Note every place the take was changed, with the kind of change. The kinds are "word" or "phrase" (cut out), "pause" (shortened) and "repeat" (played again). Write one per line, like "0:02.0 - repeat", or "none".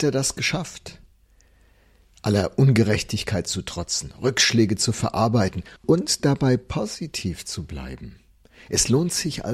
0:05.8 - pause